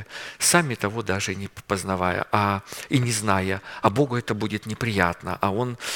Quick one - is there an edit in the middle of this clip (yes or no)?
no